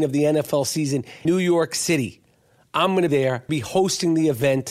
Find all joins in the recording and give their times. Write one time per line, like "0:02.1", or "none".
0:01.2
0:03.1
0:03.5